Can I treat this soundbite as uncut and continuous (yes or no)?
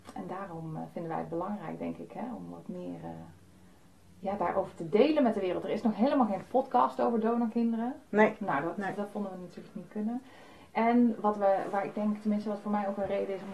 yes